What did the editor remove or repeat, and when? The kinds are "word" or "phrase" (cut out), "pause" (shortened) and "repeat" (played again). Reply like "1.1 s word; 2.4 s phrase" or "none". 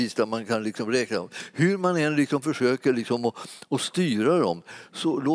none